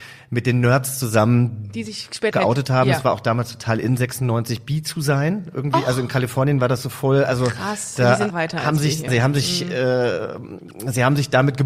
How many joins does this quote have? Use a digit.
3